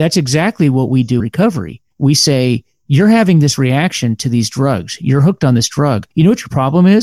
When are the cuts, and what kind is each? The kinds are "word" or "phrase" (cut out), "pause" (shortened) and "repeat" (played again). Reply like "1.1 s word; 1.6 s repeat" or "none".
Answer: 1.2 s word; 1.9 s pause; 6.1 s pause